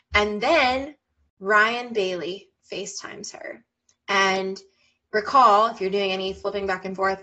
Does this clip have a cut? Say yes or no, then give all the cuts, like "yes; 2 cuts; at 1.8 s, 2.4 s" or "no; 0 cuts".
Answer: yes; 1 cut; at 5.0 s